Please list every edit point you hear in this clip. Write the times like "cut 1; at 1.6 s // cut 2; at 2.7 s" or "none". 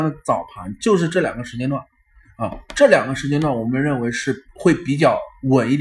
cut 1; at 4.5 s